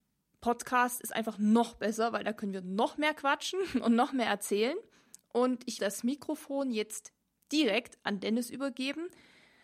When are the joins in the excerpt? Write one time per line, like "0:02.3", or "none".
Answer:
0:05.8